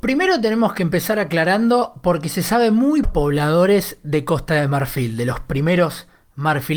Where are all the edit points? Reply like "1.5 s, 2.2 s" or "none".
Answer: 3.0 s